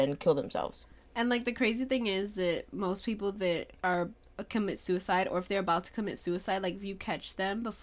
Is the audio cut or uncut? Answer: uncut